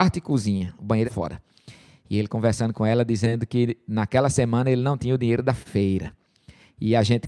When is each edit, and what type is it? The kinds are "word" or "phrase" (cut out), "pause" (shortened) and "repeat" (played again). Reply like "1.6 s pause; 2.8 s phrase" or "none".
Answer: 1.0 s word